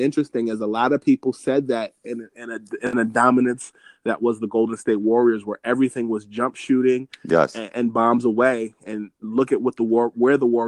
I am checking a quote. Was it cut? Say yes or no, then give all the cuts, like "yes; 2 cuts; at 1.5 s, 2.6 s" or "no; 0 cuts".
yes; 1 cut; at 7.7 s